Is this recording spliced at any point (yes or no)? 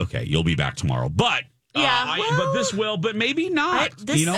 no